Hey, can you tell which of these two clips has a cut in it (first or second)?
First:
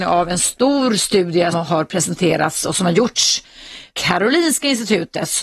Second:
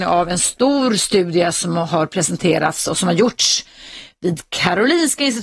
first